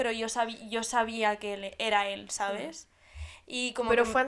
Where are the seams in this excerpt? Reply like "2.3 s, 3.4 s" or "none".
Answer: none